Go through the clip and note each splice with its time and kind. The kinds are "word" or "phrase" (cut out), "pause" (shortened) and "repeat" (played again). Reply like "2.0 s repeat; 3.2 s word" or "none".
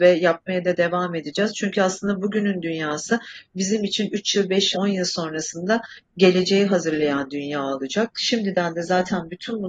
4.7 s word

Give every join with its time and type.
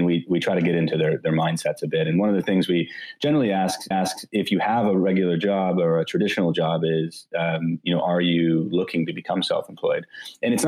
3.9 s repeat

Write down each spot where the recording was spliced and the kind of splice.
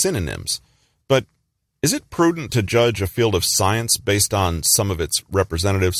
none

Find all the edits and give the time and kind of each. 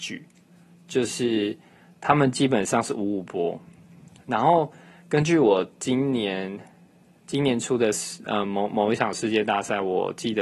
none

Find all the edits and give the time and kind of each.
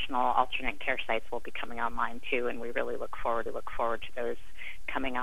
3.5 s repeat

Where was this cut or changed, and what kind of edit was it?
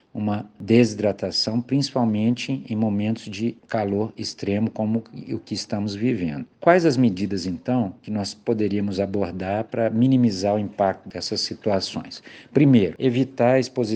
3.6 s pause; 6.5 s pause

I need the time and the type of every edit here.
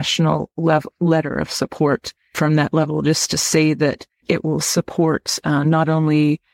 none

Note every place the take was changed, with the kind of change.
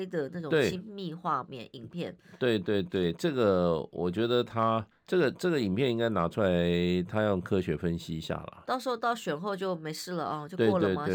4.9 s pause

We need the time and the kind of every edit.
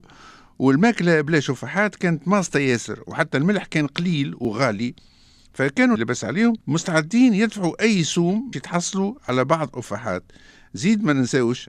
6.0 s phrase; 6.6 s pause; 8.5 s word

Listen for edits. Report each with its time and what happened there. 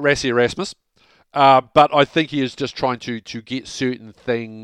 none

